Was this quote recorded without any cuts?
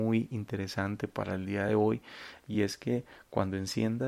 yes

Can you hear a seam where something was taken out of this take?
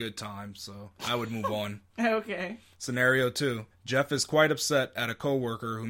yes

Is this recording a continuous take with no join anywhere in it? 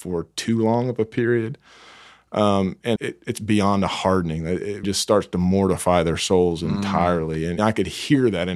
no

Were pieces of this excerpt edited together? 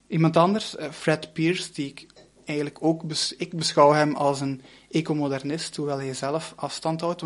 no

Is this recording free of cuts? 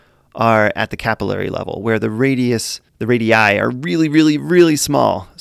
no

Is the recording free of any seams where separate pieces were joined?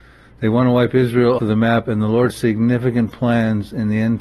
no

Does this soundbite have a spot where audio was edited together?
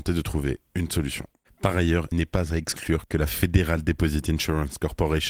yes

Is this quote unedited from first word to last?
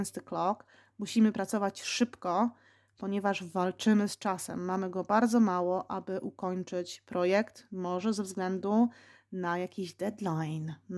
yes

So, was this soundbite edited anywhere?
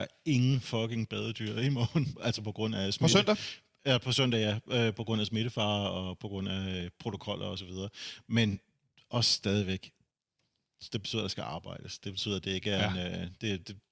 no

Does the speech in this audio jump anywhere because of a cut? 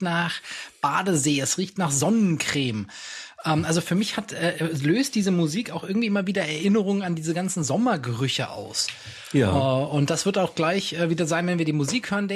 no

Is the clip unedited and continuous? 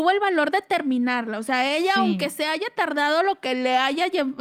yes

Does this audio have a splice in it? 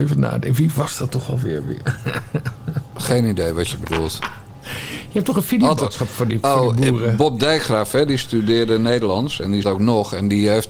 yes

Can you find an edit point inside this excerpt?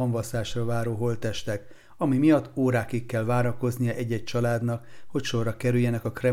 no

